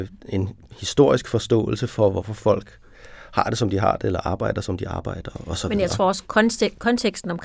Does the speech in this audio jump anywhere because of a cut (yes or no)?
no